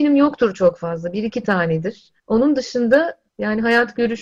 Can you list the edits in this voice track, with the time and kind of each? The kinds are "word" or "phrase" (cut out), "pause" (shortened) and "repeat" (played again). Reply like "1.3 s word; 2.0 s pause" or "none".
2.2 s pause; 3.3 s pause